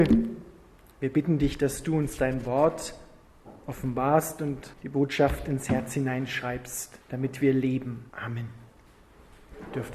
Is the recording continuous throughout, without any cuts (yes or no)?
no